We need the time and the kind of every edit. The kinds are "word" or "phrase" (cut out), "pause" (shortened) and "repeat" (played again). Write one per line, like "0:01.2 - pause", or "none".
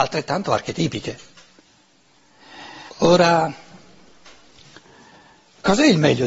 0:02.9 - pause